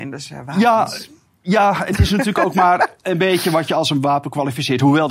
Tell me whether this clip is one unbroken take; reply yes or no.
yes